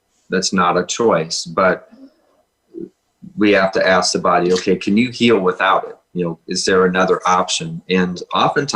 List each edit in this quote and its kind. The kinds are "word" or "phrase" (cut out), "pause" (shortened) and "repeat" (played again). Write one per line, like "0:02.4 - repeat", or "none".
0:06.0 - pause